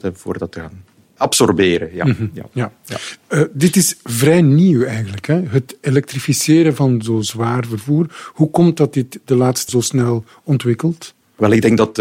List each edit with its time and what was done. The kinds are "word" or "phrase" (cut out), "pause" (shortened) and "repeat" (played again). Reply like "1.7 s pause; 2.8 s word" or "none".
9.7 s word